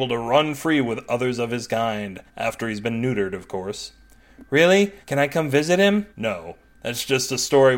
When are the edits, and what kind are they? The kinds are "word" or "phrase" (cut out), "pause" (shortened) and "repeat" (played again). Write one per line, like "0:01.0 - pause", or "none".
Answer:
0:02.3 - pause
0:05.0 - pause
0:06.1 - pause